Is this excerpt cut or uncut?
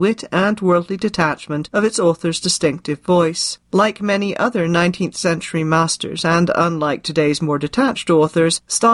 cut